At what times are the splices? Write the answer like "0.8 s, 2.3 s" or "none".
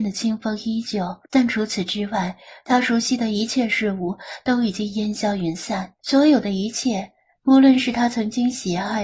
1.3 s, 6.0 s